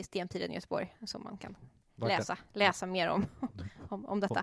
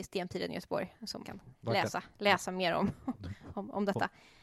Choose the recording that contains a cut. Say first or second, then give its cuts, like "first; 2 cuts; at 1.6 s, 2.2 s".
second; 2 cuts; at 1.2 s, 1.5 s